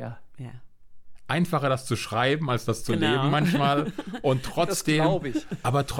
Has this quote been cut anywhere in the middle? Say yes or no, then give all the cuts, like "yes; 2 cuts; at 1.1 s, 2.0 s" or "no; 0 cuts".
no; 0 cuts